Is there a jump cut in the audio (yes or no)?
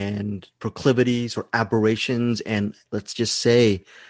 no